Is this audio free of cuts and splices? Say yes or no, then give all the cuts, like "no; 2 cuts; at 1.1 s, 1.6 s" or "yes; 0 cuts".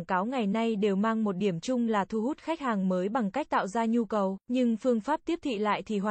no; 1 cut; at 4.4 s